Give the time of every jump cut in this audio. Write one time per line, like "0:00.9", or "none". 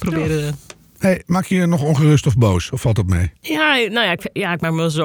none